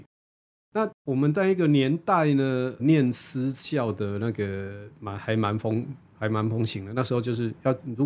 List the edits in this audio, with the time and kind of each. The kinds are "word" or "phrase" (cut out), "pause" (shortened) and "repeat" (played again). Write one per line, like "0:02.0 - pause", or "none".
0:00.9 - pause
0:02.8 - word